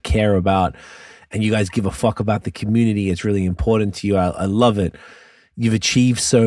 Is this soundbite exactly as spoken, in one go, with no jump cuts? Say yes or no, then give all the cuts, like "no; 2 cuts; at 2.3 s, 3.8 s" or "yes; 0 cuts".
yes; 0 cuts